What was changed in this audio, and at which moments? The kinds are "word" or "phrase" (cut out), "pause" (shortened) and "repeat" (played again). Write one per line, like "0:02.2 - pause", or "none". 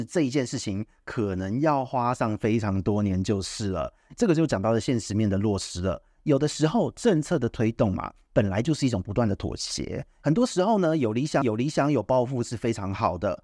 0:11.4 - repeat